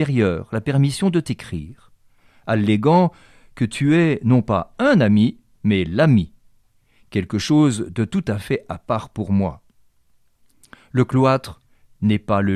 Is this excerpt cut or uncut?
uncut